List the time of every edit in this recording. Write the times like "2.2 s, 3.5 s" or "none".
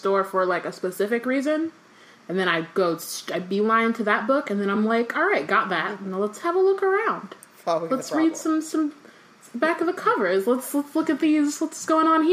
none